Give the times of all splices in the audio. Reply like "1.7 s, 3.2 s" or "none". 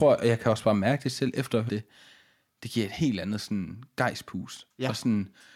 1.7 s